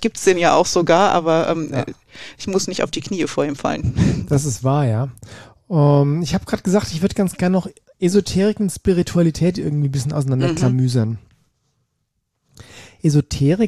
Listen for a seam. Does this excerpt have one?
no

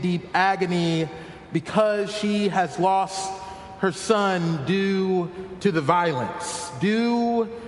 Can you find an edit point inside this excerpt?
no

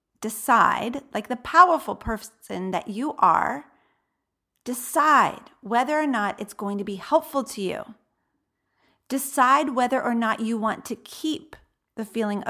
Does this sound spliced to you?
no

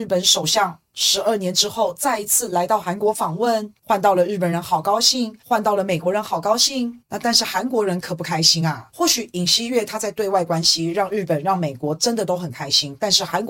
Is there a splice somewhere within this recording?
no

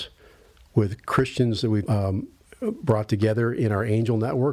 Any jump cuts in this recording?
yes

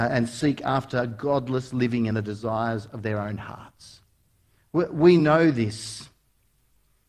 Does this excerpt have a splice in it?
no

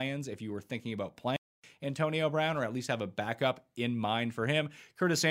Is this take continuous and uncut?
yes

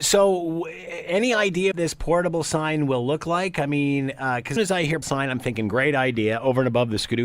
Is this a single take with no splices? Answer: no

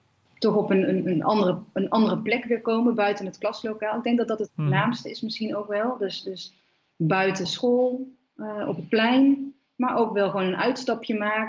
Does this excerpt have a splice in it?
no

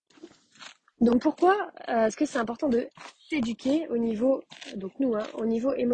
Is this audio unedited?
yes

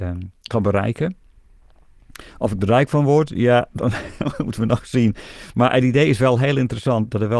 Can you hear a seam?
no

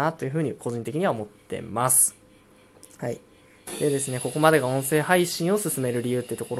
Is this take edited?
no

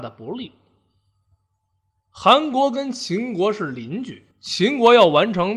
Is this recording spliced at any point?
yes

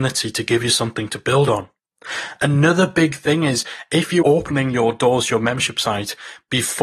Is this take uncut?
no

